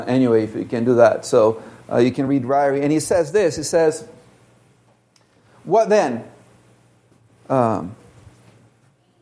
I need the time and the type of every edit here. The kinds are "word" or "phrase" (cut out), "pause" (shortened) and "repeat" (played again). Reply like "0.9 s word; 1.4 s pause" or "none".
none

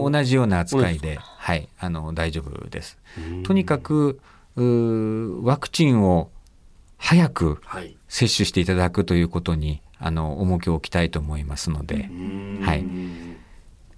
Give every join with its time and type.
none

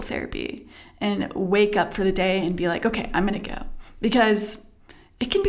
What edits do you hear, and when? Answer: none

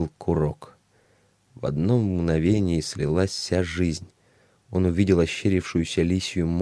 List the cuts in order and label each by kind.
none

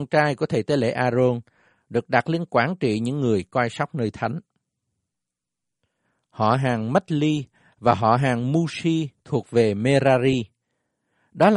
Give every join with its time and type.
none

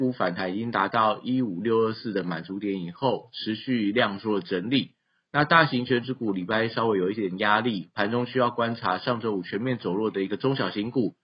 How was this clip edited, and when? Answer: none

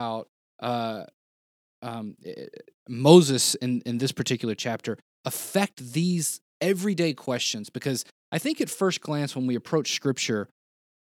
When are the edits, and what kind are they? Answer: none

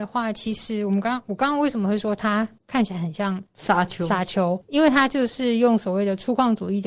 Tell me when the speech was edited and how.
2.6 s pause; 3.5 s pause; 4.6 s word

